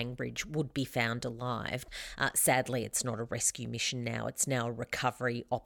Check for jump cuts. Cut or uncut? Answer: uncut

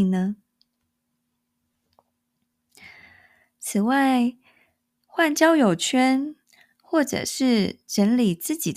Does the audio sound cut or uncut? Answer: uncut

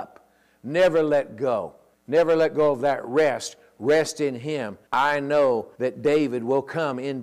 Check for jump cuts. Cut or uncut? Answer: cut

